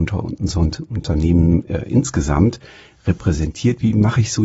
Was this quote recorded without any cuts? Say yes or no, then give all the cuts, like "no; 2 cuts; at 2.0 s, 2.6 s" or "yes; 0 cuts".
yes; 0 cuts